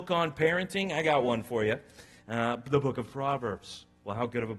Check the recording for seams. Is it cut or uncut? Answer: uncut